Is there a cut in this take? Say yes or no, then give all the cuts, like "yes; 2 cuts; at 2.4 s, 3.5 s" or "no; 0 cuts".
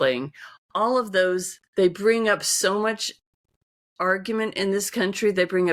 yes; 1 cut; at 1.7 s